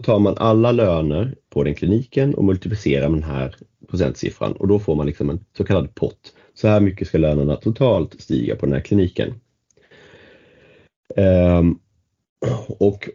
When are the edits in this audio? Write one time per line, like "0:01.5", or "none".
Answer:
none